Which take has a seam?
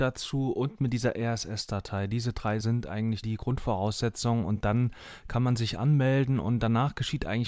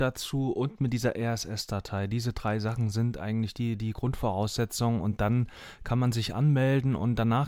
first; 2 cuts; at 2.6 s, 3.2 s

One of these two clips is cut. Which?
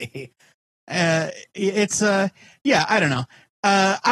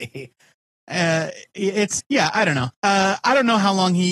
second; 2 cuts; at 2.0 s, 2.7 s

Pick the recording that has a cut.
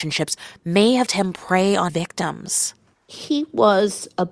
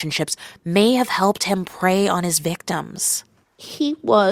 first; 2 cuts; at 1.1 s, 1.9 s

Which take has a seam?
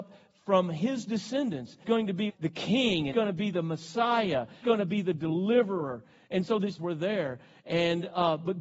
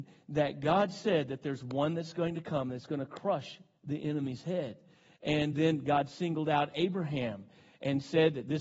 first; 5 cuts; at 1.8 s, 2.3 s, 3.1 s, 4.6 s, 6.8 s

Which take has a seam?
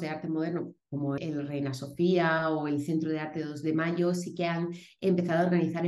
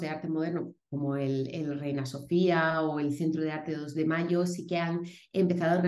first; 1 cut; at 1.2 s

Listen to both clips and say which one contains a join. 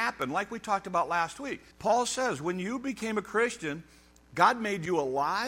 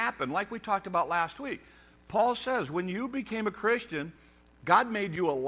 first; 1 cut; at 1.7 s

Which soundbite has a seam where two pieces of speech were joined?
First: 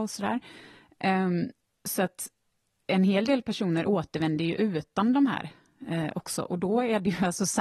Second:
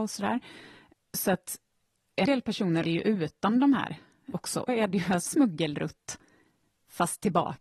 second; 6 cuts; at 0.9 s, 2.3 s, 2.8 s, 4.3 s, 4.7 s, 5.3 s

